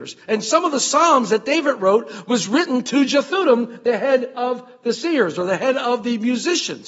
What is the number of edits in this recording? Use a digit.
0